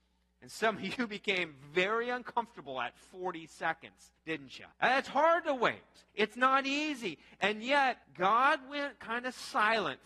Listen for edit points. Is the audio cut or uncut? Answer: cut